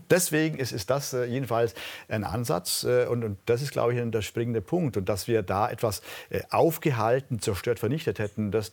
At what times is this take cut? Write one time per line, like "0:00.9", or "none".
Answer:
none